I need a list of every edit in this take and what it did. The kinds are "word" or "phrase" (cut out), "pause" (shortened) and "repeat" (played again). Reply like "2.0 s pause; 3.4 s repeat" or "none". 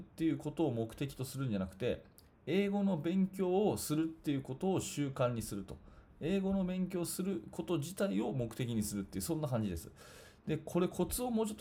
none

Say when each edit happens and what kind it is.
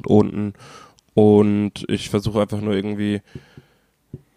none

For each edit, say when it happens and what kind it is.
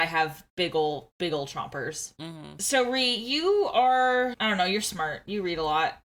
none

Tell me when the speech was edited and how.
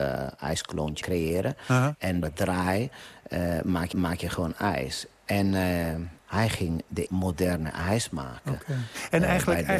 1.0 s phrase; 2.2 s word; 3.9 s repeat; 6.2 s pause; 7.1 s word

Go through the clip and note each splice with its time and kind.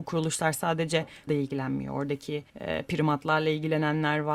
1.3 s word; 2.5 s pause

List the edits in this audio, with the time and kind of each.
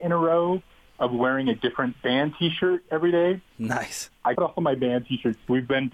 3.5 s pause; 4.3 s phrase

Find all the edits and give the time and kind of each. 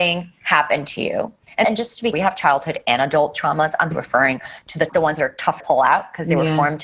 1.6 s word; 2.1 s word; 3.9 s word; 4.9 s word; 5.6 s word

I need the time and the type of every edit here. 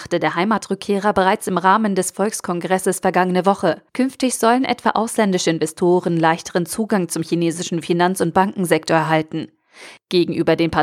3.9 s pause

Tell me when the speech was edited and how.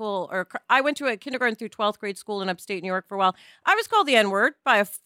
none

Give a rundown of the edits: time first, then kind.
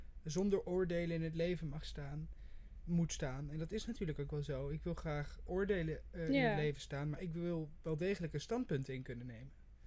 5.5 s word

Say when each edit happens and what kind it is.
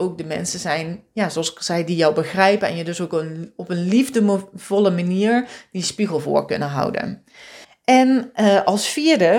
7.6 s pause

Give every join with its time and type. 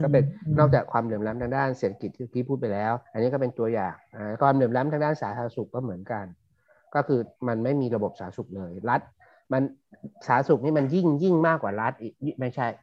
3.1 s pause; 7.4 s pause

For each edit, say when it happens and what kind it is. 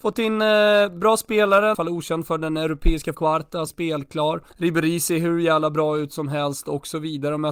1.7 s phrase; 3.1 s word; 3.7 s phrase; 4.5 s pause

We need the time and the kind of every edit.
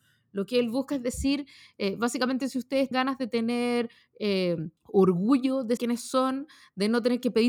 2.9 s word; 4.8 s pause; 5.8 s word

